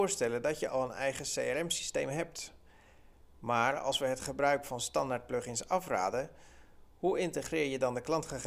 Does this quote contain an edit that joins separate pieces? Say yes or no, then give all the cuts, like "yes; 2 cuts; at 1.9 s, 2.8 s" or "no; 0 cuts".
no; 0 cuts